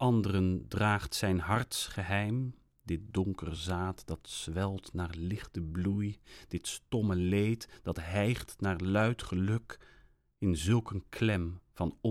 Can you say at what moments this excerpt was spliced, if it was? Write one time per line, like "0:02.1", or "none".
none